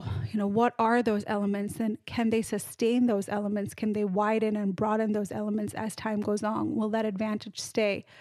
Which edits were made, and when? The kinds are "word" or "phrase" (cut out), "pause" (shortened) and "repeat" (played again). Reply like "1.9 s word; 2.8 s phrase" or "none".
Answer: none

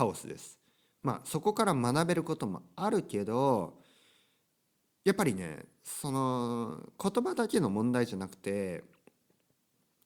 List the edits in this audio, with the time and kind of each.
none

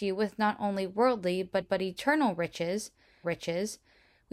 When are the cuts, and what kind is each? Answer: 1.6 s repeat; 3.2 s repeat

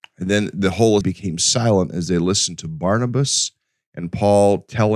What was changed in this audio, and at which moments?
1.0 s word

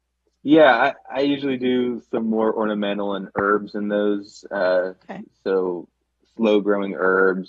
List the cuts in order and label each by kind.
1.0 s pause

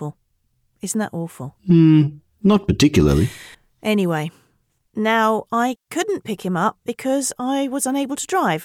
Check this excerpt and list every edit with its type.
1.6 s pause; 3.5 s pause; 5.8 s pause

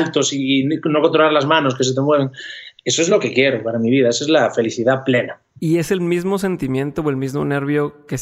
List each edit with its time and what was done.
none

